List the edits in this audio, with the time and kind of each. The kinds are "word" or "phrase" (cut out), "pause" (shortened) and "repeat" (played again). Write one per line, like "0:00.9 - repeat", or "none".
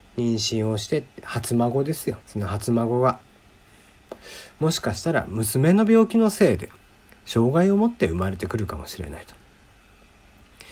0:02.2 - pause